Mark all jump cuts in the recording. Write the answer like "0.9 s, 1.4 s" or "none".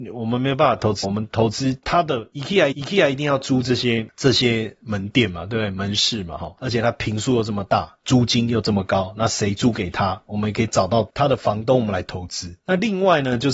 1.0 s, 2.7 s